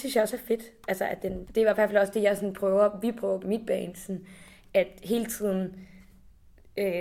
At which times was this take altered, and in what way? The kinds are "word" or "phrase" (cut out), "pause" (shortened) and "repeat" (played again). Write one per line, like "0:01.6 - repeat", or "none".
0:01.4 - word
0:03.4 - word

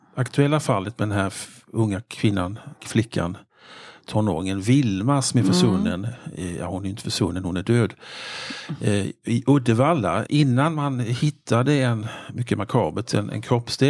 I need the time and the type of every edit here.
0:10.3 - word

